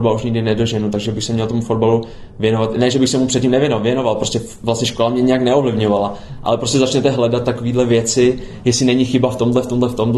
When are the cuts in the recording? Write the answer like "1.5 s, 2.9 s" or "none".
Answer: none